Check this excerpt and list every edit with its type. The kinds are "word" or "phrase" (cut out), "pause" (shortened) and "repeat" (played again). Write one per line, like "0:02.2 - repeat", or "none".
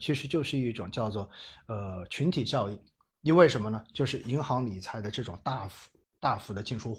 none